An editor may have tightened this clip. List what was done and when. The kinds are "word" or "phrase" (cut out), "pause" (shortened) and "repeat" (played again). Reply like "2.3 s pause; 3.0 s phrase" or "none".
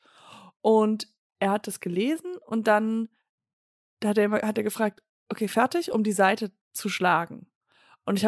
6.6 s pause